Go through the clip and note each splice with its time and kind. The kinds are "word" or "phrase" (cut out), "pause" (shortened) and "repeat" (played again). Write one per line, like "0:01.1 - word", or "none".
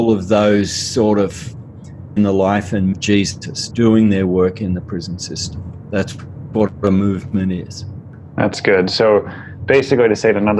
0:02.2 - phrase
0:02.9 - phrase
0:03.7 - word